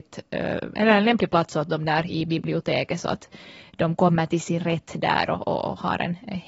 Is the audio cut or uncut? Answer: uncut